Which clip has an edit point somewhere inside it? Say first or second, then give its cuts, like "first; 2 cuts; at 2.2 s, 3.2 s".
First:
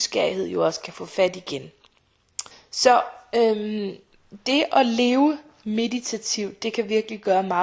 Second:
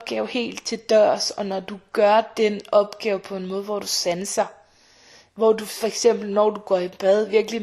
first; 1 cut; at 2.5 s